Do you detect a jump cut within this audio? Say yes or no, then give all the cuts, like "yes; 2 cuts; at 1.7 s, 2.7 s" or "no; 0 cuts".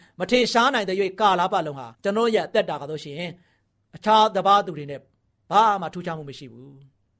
yes; 2 cuts; at 1.9 s, 3.7 s